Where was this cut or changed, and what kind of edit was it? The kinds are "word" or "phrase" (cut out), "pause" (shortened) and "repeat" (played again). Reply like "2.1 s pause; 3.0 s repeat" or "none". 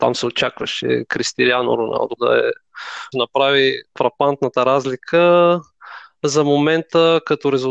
2.2 s word; 3.1 s phrase; 3.9 s pause